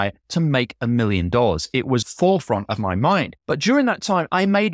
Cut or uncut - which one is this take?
cut